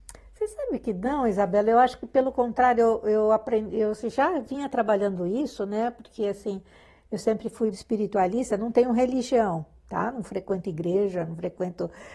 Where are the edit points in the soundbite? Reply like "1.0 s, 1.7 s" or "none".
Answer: 7.7 s

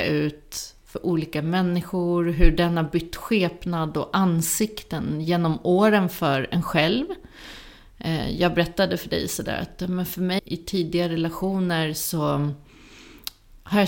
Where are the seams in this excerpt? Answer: 10.4 s

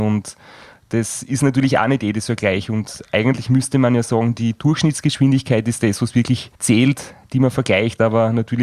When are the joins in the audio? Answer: 6.5 s

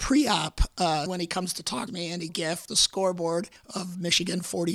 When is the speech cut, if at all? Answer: 1.1 s, 1.9 s, 2.3 s, 2.7 s, 3.6 s

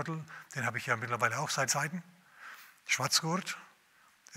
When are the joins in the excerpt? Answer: 1.7 s

